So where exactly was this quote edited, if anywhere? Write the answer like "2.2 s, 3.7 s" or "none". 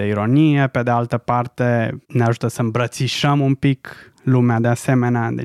2.0 s

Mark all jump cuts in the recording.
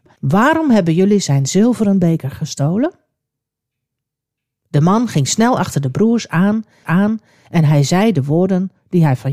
6.8 s

